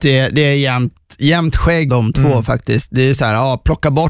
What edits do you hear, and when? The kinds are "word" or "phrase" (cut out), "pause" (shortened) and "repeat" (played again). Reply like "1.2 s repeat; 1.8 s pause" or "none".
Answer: 1.9 s word